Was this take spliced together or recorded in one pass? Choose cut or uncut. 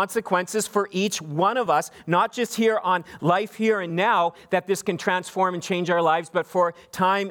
uncut